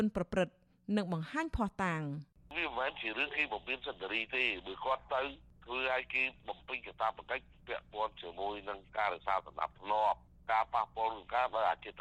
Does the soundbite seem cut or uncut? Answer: uncut